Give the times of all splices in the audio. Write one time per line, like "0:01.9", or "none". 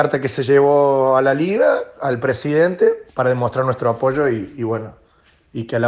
0:03.1